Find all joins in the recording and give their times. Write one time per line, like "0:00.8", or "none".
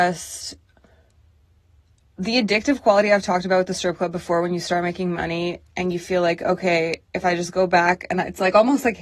none